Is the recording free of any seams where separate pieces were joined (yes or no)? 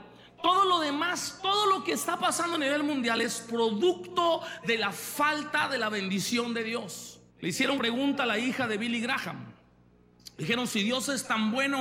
no